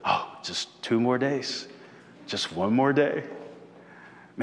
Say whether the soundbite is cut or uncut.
uncut